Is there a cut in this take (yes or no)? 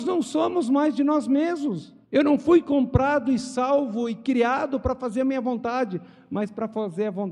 yes